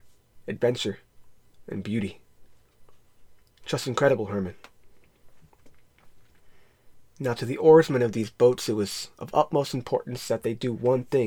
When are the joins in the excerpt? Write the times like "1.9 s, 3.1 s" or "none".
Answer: none